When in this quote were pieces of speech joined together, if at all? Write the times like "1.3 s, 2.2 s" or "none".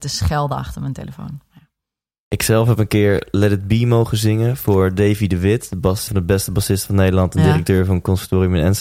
6.1 s